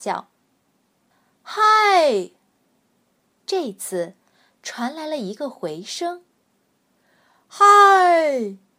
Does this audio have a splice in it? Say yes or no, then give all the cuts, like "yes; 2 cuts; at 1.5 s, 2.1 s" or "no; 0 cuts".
no; 0 cuts